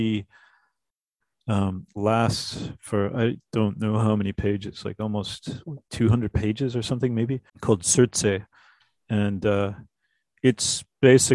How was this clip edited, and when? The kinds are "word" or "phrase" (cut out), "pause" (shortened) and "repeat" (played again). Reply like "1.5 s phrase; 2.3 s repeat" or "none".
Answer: 1.9 s phrase; 5.8 s pause; 7.5 s pause